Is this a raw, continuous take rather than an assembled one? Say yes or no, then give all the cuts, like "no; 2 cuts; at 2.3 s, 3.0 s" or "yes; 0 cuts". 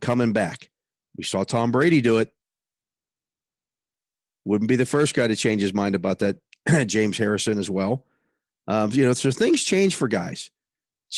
yes; 0 cuts